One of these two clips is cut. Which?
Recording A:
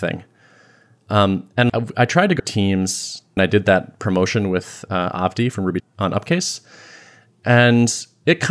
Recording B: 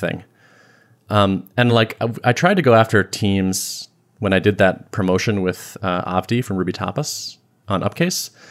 A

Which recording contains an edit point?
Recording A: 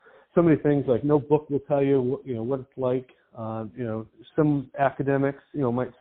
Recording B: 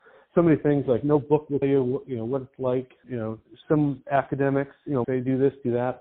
B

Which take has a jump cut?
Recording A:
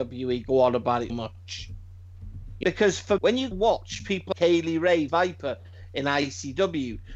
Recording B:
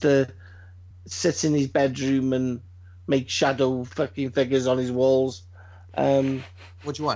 A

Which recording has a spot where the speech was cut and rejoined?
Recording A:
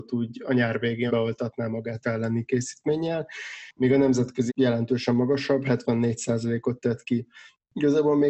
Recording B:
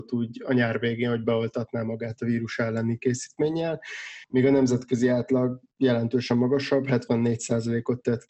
A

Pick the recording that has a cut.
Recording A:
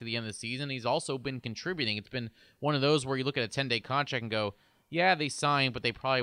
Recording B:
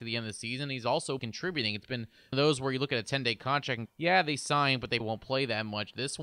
B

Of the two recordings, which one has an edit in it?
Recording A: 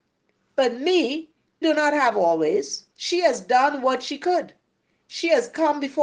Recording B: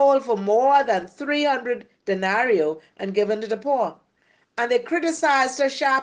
A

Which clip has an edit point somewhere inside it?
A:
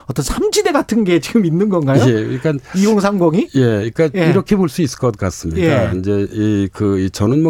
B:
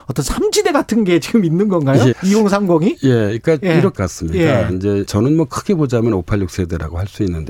B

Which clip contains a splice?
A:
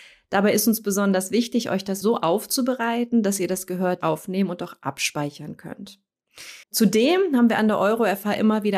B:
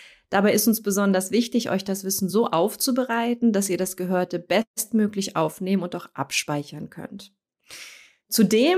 A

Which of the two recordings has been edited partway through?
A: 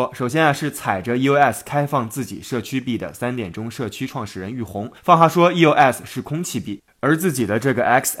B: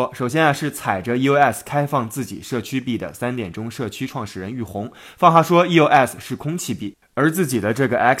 A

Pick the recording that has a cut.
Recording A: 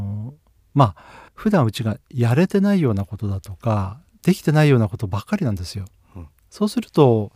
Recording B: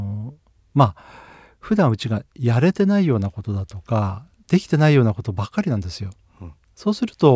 A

